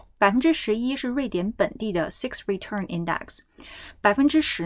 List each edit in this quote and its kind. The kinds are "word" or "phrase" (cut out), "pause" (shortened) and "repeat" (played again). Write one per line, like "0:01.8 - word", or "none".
none